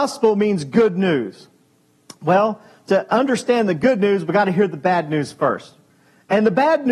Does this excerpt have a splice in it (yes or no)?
no